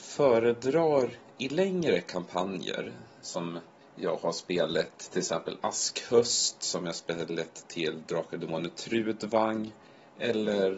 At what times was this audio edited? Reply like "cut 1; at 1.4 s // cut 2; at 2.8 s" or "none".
none